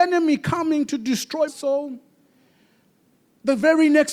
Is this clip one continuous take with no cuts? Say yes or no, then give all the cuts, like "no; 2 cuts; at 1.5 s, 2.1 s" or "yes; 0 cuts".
no; 1 cut; at 1.5 s